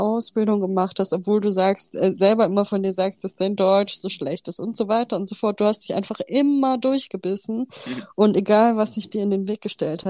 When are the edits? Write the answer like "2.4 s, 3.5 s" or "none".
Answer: none